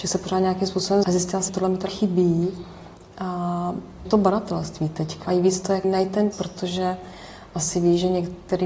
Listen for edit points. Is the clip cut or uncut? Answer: cut